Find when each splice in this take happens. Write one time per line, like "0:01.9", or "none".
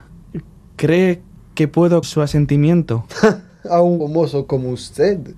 0:02.0
0:04.0